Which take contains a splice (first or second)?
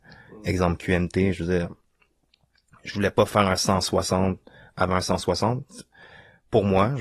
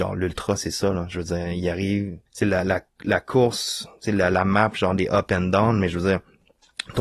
second